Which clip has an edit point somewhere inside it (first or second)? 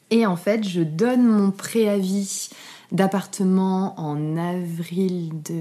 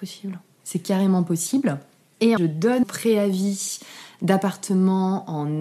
second